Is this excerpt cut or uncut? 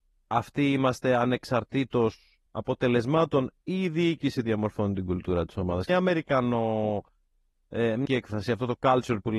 cut